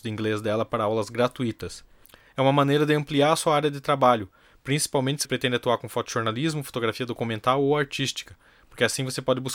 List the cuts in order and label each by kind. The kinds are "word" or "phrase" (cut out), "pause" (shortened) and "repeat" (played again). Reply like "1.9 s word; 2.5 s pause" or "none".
5.2 s word